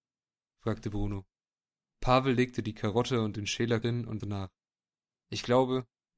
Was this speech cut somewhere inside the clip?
yes; 2 cuts; at 3.8 s, 4.2 s

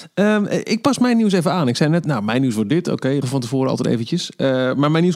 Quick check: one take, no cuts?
no; 2 cuts; at 2.0 s, 3.2 s

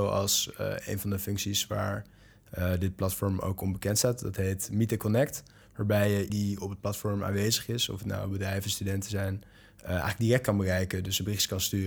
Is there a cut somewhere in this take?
yes; 1 cut; at 6.3 s

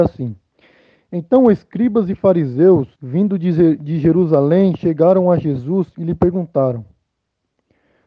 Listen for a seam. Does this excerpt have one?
yes; 1 cut; at 2.9 s

